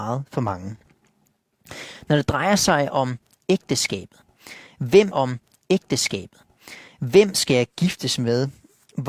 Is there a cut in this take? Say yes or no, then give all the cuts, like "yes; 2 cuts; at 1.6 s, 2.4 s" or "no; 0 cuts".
yes; 1 cut; at 5.1 s